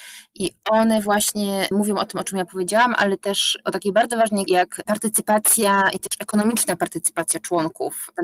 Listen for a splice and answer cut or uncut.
cut